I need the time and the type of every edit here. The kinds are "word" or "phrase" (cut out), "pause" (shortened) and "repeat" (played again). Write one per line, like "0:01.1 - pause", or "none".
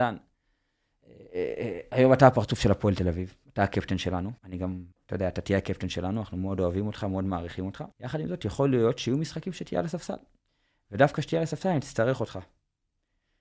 0:04.4 - pause
0:04.9 - pause
0:07.9 - pause